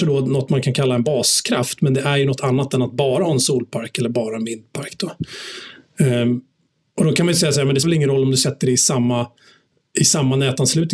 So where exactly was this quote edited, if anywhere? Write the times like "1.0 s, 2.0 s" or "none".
2.4 s, 7.8 s